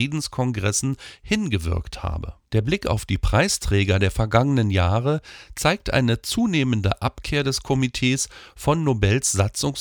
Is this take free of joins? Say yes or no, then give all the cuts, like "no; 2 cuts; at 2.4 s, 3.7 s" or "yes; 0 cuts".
no; 1 cut; at 2.5 s